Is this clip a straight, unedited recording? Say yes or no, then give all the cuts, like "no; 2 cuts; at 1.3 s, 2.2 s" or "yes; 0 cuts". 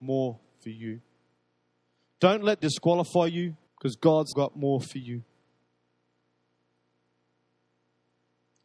no; 3 cuts; at 2.6 s, 3.7 s, 4.3 s